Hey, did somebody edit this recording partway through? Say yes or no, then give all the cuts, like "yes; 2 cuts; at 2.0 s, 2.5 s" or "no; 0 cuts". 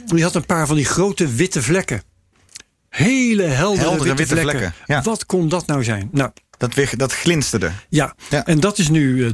no; 0 cuts